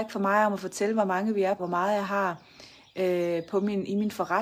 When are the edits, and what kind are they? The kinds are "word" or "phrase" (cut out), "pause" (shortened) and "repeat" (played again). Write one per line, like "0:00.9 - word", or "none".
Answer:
0:01.6 - word

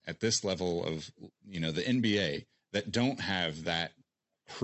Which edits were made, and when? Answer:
0:02.6 - pause

